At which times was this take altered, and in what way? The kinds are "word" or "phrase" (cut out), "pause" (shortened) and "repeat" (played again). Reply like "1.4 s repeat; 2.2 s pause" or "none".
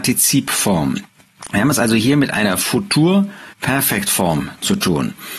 3.5 s pause